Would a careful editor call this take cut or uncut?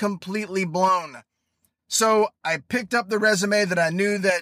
uncut